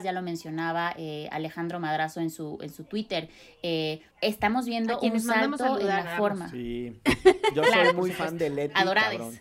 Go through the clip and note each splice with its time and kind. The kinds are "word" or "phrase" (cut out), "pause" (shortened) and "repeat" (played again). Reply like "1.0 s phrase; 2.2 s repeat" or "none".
4.1 s pause